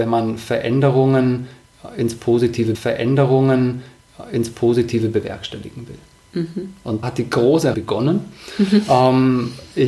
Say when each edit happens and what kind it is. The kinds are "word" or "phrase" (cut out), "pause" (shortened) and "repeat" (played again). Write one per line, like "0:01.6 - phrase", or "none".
0:02.7 - repeat
0:07.0 - word
0:07.7 - word